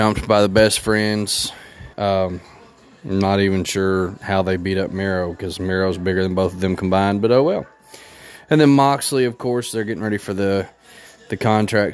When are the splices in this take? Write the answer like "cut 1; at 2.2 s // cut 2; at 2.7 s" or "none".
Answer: cut 1; at 1.9 s